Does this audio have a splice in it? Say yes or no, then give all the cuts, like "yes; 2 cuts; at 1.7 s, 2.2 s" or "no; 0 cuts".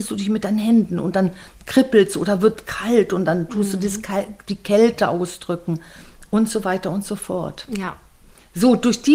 no; 0 cuts